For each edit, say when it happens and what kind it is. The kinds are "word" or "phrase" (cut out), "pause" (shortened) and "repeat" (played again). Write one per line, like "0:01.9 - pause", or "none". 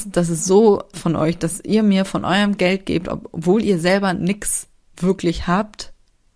0:00.9 - word